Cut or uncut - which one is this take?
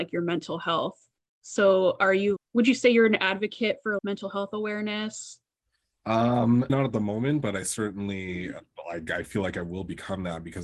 cut